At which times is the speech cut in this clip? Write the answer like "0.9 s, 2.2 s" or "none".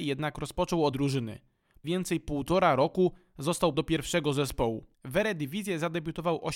0.9 s, 1.8 s, 3.7 s, 4.9 s